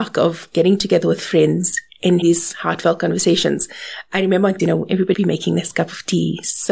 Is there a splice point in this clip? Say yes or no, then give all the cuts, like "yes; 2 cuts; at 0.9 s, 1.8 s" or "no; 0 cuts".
yes; 3 cuts; at 2.2 s, 4.6 s, 5.1 s